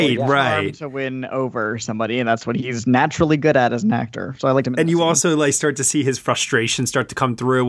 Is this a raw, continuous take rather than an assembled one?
yes; 0 cuts

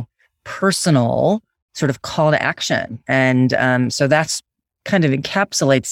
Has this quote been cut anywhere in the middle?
no; 0 cuts

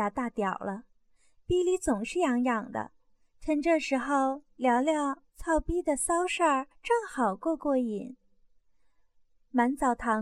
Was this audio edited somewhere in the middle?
yes; 2 cuts; at 5.3 s, 6.7 s

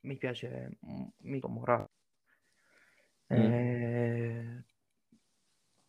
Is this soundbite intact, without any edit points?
no; 1 cut; at 1.4 s

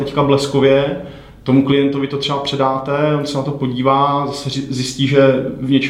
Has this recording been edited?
no; 0 cuts

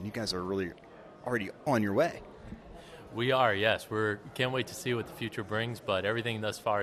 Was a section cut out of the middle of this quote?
yes; 1 cut; at 1.7 s

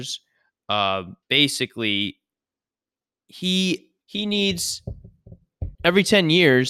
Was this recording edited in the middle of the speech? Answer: yes; 3 cuts; at 1.2 s, 4.0 s, 5.7 s

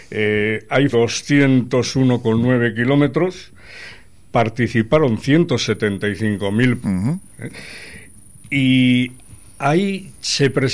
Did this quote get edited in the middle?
yes; 2 cuts; at 0.9 s, 6.8 s

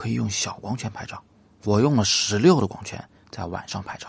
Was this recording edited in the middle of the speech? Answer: no; 0 cuts

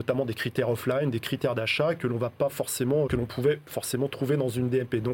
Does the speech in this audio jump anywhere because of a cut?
yes; 1 cut; at 3.1 s

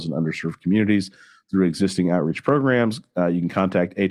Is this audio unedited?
yes; 0 cuts

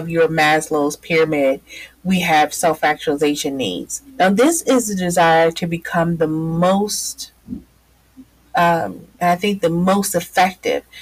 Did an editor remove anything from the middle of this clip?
yes; 2 cuts; at 4.1 s, 9.1 s

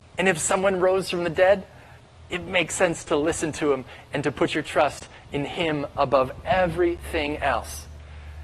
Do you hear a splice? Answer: no; 0 cuts

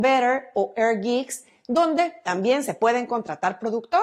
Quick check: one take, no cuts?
yes; 0 cuts

